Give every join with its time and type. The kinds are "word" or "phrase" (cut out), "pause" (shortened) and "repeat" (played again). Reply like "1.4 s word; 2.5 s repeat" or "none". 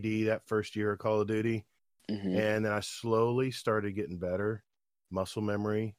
none